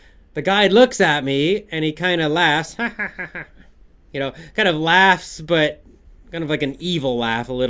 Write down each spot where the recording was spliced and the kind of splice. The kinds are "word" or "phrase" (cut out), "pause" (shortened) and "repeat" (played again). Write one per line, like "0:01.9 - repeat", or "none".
none